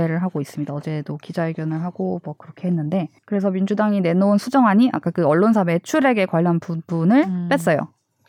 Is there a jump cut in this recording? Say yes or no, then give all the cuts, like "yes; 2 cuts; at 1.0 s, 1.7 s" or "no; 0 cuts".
yes; 1 cut; at 3.2 s